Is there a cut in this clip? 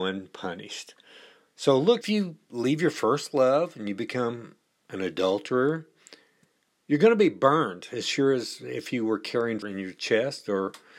yes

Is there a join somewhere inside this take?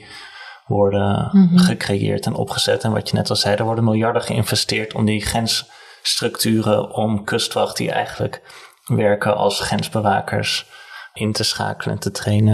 no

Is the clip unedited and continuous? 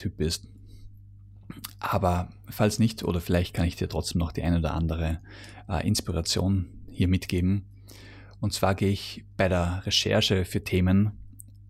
yes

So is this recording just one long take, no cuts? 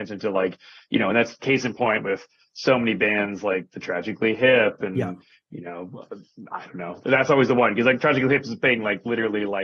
yes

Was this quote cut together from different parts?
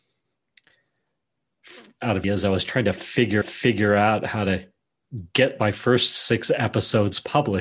yes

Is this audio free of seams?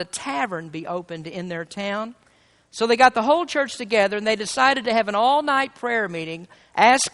yes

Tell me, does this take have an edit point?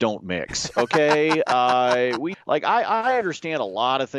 yes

